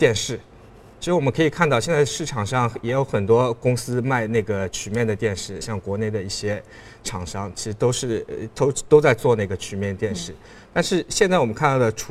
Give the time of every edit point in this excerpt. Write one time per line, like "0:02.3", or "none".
0:05.6